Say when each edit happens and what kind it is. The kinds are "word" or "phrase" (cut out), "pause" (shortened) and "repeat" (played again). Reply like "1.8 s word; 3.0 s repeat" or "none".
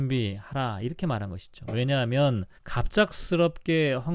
2.6 s pause